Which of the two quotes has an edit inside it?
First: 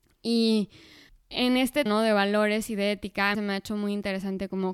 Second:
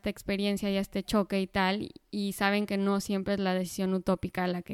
first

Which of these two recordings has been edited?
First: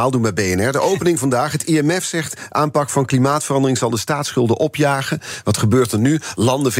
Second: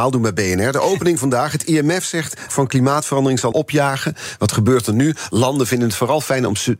second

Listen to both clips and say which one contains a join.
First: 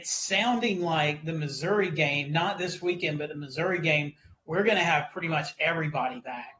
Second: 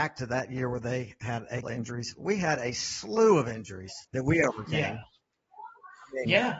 second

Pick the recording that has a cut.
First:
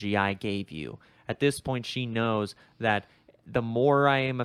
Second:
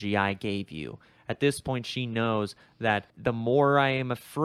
second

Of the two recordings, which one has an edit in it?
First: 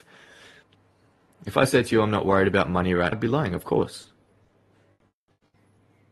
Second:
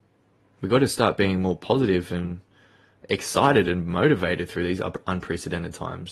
first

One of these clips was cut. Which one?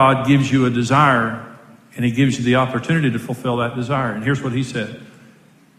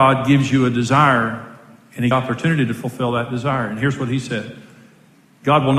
second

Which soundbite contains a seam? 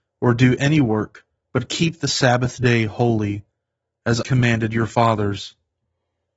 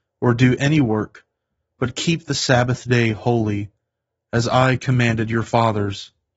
first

